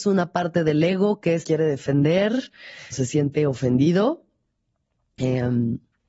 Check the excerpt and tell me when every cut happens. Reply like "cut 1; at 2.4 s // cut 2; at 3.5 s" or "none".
cut 1; at 1.4 s // cut 2; at 2.9 s